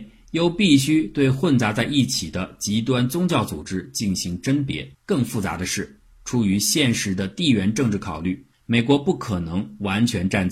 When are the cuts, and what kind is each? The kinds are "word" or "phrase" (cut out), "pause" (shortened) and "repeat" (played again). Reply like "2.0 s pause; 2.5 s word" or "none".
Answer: 4.9 s pause; 8.5 s pause